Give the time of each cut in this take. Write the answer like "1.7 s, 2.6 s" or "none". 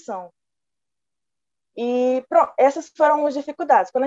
none